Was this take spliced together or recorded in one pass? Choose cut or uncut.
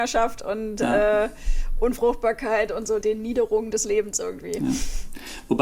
cut